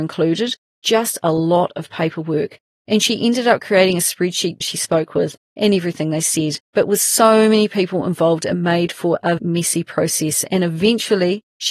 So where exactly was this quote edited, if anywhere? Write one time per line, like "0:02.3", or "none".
0:04.6
0:06.6
0:09.4